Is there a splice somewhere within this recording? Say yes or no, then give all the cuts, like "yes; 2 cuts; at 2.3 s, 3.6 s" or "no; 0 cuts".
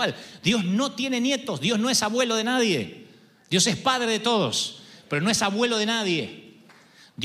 no; 0 cuts